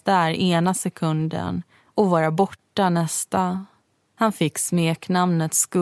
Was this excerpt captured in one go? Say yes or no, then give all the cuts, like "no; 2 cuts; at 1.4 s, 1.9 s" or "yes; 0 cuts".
yes; 0 cuts